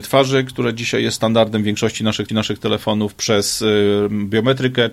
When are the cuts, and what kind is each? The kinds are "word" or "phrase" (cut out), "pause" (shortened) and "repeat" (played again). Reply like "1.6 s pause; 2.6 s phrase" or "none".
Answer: 2.3 s repeat